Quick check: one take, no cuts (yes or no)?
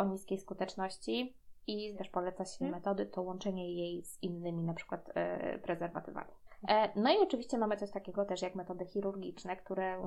no